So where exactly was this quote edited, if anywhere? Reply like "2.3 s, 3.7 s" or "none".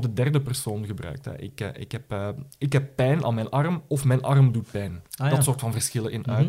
5.1 s